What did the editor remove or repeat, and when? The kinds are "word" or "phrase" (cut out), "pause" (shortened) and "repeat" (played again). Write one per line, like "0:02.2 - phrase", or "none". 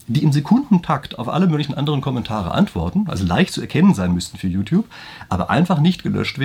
none